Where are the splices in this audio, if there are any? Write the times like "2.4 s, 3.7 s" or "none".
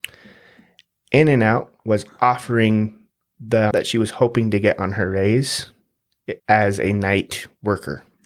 3.7 s, 6.4 s